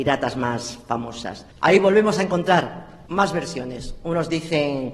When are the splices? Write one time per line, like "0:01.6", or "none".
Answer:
0:01.5
0:03.1